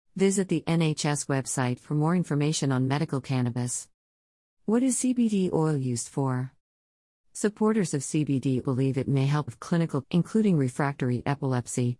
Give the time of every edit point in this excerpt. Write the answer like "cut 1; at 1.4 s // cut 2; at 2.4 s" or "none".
cut 1; at 8.6 s // cut 2; at 9.5 s // cut 3; at 10.0 s